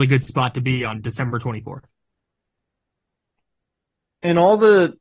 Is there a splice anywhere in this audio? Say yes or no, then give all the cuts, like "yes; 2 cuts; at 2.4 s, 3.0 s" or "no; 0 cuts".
no; 0 cuts